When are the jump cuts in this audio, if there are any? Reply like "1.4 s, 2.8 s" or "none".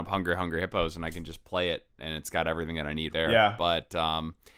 3.1 s